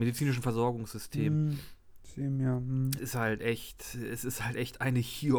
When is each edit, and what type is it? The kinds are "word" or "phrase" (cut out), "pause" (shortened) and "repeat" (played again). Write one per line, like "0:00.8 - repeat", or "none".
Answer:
0:03.0 - word